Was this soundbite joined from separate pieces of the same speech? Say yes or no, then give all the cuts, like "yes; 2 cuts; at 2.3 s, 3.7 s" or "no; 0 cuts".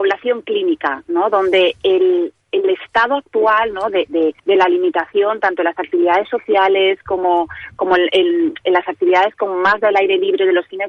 yes; 1 cut; at 4.4 s